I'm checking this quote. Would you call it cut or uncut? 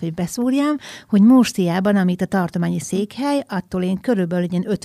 uncut